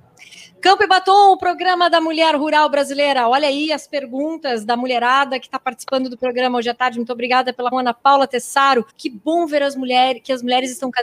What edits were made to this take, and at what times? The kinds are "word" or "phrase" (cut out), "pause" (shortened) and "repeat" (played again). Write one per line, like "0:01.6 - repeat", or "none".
0:07.7 - word
0:08.9 - pause